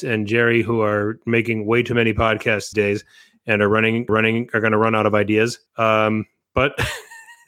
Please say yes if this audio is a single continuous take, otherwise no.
no